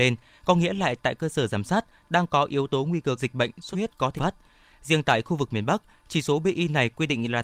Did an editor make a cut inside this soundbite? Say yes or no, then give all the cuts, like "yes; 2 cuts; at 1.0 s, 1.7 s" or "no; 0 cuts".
yes; 3 cuts; at 3.2 s, 3.7 s, 4.2 s